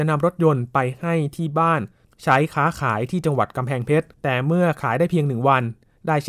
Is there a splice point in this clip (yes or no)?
yes